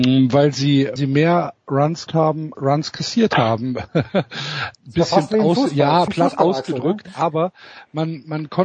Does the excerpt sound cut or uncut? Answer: cut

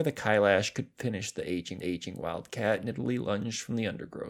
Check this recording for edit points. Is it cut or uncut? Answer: cut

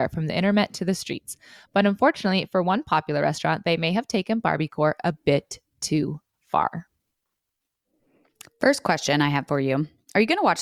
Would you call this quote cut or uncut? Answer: uncut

